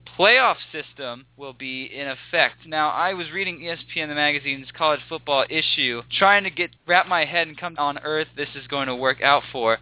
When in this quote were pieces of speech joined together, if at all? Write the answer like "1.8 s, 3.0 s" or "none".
1.3 s, 6.1 s, 6.8 s, 7.8 s